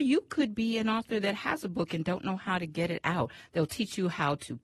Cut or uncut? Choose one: uncut